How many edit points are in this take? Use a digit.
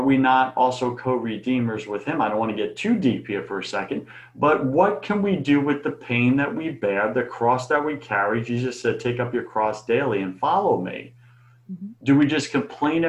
1